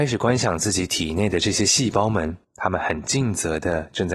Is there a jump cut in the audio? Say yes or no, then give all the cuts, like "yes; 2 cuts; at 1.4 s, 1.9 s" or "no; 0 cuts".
yes; 1 cut; at 2.4 s